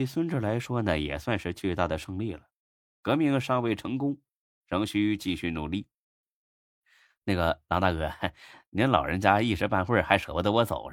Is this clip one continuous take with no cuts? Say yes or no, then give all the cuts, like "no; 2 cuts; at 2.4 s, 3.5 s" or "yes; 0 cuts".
yes; 0 cuts